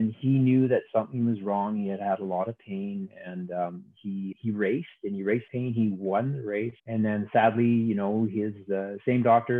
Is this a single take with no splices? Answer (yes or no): no